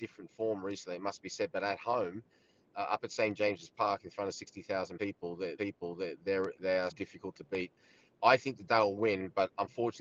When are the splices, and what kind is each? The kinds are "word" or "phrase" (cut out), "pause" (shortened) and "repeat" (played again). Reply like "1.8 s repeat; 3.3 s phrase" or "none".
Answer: 5.6 s repeat; 6.9 s word